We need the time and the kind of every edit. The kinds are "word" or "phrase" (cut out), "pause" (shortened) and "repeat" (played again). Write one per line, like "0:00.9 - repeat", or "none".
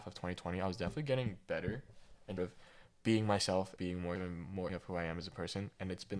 0:02.4 - word
0:03.8 - word
0:04.2 - word
0:04.7 - word